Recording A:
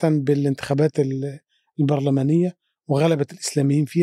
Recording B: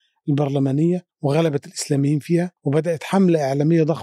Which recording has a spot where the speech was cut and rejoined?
B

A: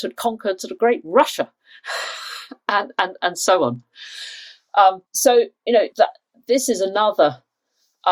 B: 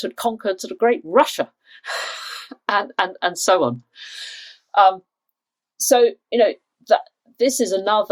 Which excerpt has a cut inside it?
A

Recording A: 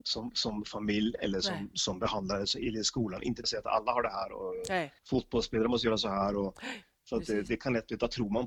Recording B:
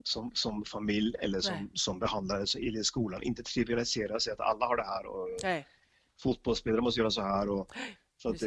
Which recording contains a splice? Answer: A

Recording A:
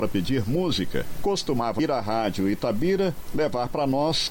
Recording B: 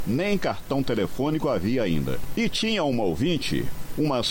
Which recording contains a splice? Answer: A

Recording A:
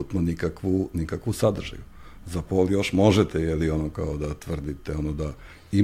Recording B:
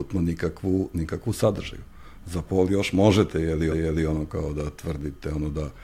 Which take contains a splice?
B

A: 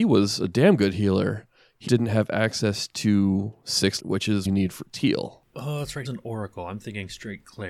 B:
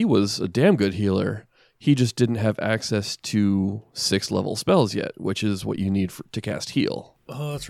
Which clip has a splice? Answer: A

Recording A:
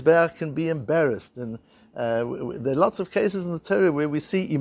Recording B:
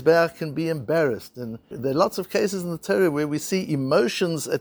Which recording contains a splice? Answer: B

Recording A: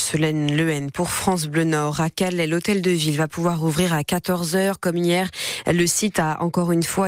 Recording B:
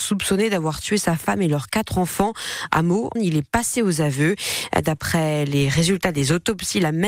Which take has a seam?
B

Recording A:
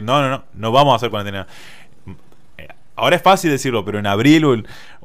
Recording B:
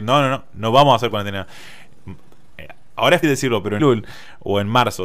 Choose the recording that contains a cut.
B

